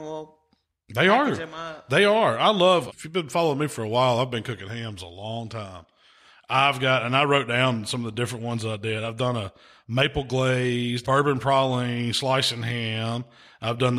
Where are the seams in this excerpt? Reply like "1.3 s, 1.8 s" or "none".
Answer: 2.9 s, 11.0 s